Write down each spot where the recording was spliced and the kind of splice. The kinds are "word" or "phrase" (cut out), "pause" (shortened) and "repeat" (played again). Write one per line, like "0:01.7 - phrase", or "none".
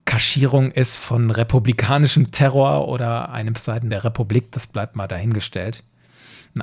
0:03.6 - phrase